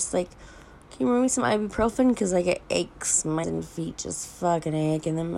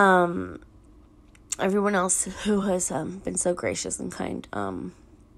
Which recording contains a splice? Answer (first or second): first